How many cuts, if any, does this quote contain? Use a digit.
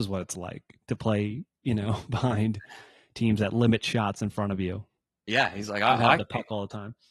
1